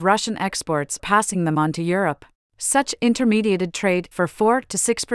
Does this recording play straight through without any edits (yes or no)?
no